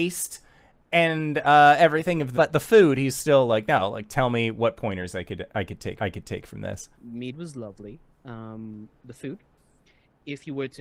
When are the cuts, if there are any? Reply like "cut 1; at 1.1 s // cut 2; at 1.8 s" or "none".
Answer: cut 1; at 2.3 s // cut 2; at 6.0 s // cut 3; at 6.9 s